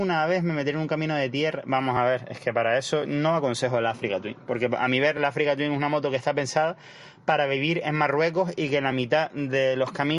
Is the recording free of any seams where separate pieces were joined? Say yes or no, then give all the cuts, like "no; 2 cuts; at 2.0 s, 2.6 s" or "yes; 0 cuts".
yes; 0 cuts